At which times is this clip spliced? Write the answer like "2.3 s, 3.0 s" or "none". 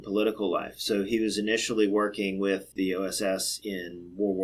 2.7 s